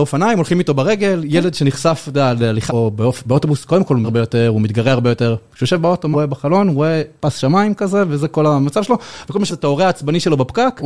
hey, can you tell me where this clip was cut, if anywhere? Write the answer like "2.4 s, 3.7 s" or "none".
2.7 s, 4.0 s, 6.1 s, 9.5 s